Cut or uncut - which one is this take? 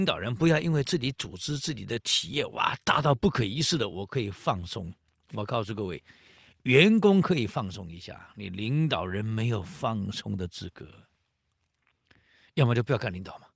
uncut